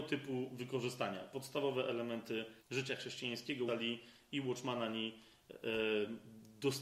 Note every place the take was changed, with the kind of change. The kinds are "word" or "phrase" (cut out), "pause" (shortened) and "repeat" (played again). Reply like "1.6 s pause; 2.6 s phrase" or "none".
2.6 s pause; 3.7 s word